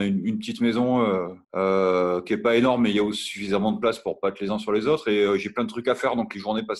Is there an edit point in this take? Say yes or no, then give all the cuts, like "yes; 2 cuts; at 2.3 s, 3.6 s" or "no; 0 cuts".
yes; 1 cut; at 1.4 s